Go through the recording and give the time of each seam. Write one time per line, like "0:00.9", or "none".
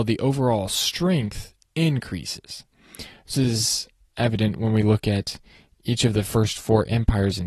0:03.3